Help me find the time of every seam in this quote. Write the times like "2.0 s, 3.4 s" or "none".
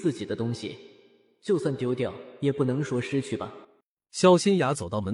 3.6 s